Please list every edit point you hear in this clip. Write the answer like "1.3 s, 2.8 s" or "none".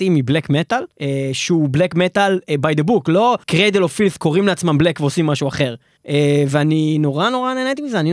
0.9 s, 3.4 s, 6.0 s

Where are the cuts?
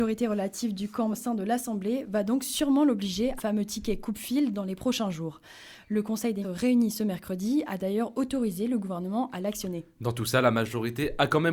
1.1 s, 3.4 s, 6.4 s

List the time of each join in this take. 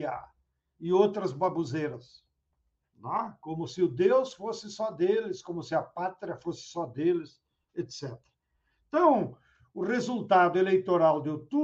none

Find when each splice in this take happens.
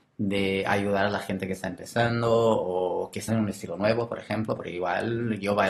3.3 s

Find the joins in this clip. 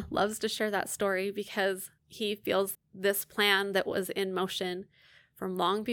2.0 s, 2.7 s

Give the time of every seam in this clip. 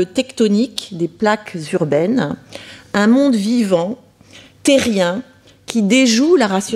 none

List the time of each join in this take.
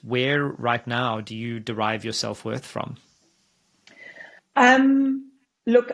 4.4 s

